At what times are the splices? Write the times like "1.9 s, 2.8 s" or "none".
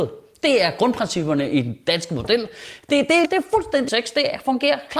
3.2 s, 3.9 s